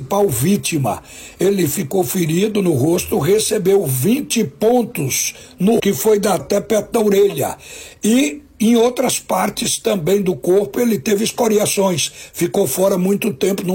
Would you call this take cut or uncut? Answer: cut